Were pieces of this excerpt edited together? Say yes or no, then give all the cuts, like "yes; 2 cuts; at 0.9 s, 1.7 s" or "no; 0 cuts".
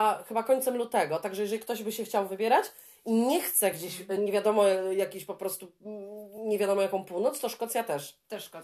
no; 0 cuts